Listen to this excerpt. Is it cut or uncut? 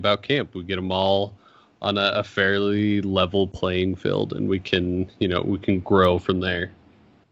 uncut